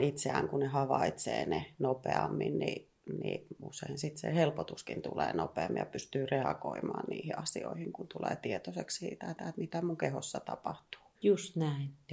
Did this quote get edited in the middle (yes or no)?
yes